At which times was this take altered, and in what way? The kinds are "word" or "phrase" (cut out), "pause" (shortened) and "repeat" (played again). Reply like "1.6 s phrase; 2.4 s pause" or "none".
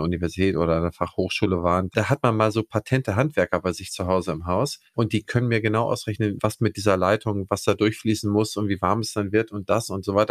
4.9 s pause